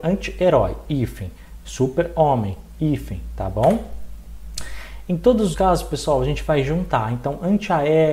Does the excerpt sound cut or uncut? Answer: cut